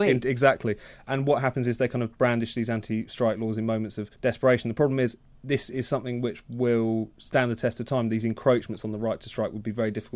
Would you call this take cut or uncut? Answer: cut